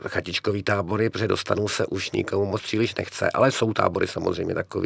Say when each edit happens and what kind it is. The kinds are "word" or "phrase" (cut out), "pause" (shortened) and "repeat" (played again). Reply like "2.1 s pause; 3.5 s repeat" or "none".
none